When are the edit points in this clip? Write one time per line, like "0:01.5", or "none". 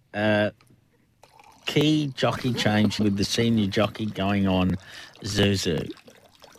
0:03.0